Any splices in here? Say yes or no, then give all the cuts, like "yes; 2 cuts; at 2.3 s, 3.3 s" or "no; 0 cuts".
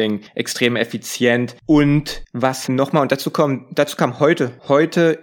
yes; 1 cut; at 2.7 s